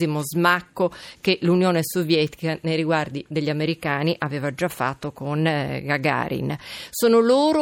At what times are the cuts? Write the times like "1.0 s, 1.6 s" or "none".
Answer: none